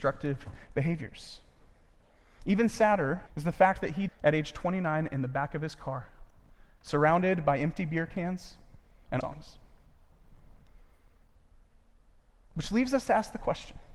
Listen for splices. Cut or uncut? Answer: cut